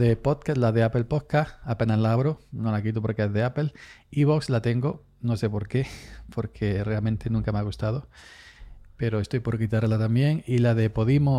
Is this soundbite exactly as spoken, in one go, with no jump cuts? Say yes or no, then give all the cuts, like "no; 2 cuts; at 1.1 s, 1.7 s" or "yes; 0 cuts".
yes; 0 cuts